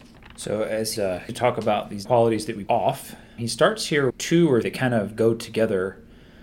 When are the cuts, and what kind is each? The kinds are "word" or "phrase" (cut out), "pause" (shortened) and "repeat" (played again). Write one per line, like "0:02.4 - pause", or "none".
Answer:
0:01.0 - word
0:01.3 - word
0:02.0 - word
0:02.7 - word
0:03.4 - word
0:04.1 - word
0:04.6 - word